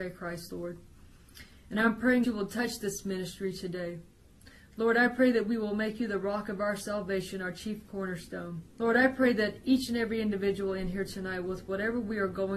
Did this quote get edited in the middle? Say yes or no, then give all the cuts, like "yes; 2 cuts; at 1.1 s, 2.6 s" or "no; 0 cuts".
yes; 2 cuts; at 2.2 s, 8.7 s